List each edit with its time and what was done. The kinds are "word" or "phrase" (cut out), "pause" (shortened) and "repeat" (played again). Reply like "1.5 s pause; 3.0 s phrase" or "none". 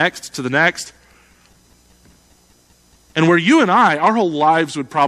none